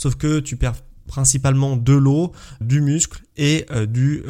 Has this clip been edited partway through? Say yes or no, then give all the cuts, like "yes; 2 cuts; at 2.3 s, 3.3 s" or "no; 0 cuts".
yes; 1 cut; at 2.6 s